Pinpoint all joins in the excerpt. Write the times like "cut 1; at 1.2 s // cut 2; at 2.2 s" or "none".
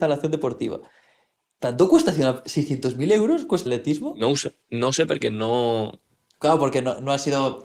cut 1; at 3.7 s // cut 2; at 4.6 s